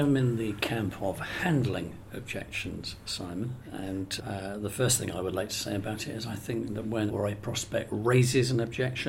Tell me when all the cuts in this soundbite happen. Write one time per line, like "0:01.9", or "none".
0:04.2
0:07.1